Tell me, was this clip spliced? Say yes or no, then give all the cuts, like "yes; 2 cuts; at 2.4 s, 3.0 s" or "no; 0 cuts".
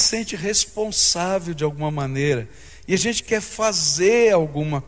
no; 0 cuts